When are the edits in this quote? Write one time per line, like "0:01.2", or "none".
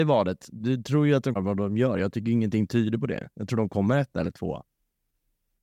0:01.4